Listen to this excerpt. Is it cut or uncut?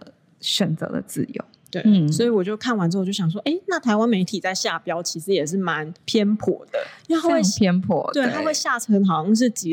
cut